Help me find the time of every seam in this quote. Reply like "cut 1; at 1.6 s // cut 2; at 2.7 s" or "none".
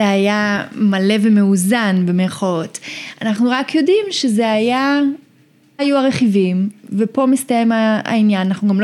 cut 1; at 5.8 s